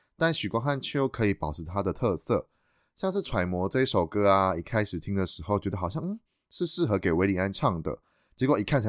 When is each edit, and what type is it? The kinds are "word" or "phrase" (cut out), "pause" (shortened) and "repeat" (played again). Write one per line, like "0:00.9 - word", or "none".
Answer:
none